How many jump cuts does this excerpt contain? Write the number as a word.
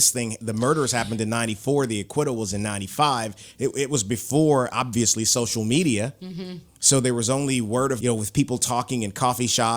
two